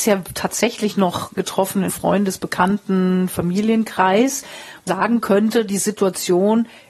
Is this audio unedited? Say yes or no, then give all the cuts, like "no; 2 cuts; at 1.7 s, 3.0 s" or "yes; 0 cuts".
no; 3 cuts; at 1.4 s, 1.9 s, 4.9 s